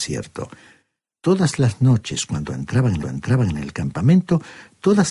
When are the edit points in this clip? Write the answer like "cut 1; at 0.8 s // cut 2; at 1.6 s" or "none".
cut 1; at 3.0 s